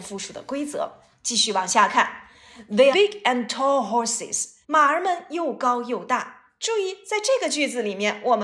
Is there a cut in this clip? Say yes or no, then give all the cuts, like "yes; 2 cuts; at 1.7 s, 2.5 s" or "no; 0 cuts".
yes; 2 cuts; at 2.9 s, 4.6 s